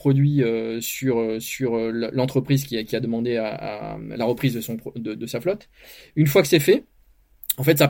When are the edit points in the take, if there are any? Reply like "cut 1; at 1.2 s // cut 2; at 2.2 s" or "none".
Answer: none